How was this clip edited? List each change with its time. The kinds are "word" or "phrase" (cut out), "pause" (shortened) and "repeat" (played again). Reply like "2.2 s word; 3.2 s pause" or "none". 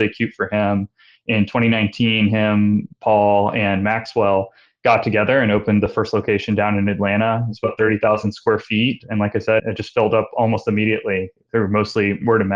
9.6 s word